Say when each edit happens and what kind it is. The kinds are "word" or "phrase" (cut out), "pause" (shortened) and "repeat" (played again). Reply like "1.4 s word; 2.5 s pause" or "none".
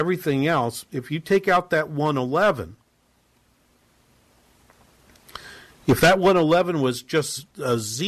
none

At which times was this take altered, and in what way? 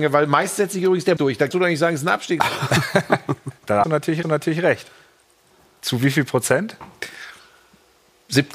1.2 s word; 1.5 s word; 3.8 s word; 4.2 s repeat

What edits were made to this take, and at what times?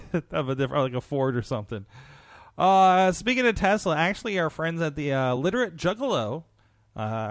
none

